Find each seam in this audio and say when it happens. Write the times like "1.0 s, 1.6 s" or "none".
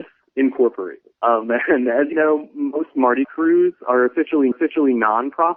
1.1 s, 2.1 s, 3.2 s, 4.5 s